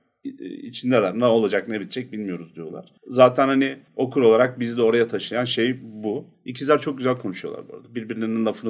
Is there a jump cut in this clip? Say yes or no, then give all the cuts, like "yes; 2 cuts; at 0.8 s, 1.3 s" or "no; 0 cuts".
yes; 3 cuts; at 3.0 s, 3.9 s, 6.3 s